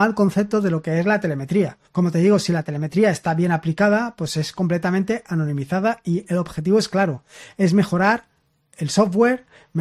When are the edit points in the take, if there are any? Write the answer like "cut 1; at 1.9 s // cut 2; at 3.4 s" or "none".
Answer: cut 1; at 1.8 s